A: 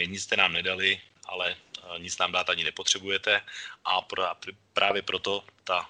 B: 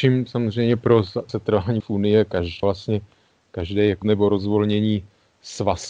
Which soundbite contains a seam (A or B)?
B